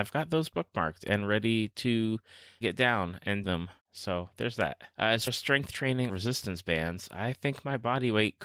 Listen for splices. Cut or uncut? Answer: cut